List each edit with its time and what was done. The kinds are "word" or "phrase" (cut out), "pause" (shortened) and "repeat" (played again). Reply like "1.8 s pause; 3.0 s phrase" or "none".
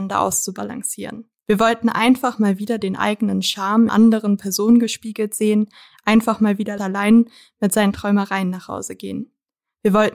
1.4 s pause; 3.9 s phrase; 6.8 s phrase